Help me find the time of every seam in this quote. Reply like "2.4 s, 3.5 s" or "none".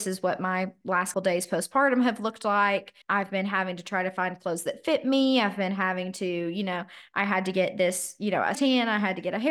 1.1 s, 3.0 s, 8.5 s